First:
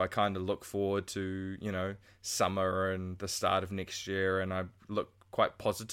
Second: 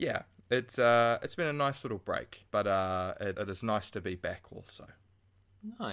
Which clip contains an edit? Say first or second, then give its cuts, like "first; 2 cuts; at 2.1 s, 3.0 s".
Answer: second; 2 cuts; at 2.5 s, 3.3 s